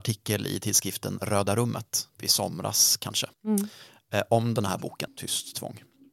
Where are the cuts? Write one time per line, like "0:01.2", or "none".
0:02.2
0:03.3
0:05.1